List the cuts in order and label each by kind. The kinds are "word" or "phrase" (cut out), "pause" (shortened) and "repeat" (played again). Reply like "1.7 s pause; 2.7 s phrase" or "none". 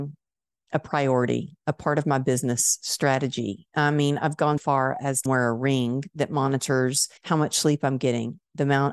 4.6 s word; 5.3 s word; 7.2 s pause